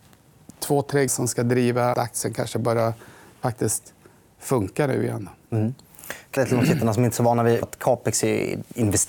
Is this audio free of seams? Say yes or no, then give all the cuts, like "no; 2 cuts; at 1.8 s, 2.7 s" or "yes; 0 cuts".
no; 4 cuts; at 1.1 s, 1.9 s, 6.4 s, 7.6 s